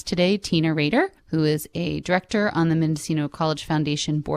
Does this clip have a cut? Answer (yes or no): yes